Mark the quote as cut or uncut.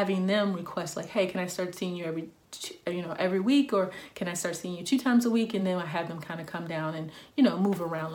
uncut